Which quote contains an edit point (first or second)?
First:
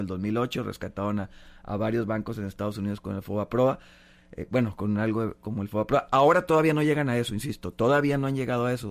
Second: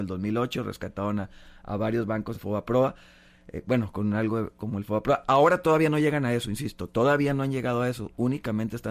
second